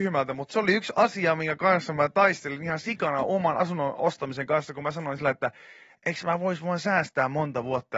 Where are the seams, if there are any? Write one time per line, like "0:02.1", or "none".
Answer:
none